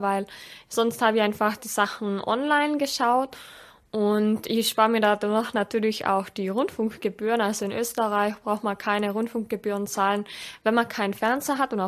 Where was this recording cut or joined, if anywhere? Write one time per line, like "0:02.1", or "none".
none